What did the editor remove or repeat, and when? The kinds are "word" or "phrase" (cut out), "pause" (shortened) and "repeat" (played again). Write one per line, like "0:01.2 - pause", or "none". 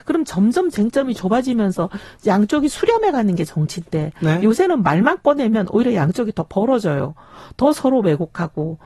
none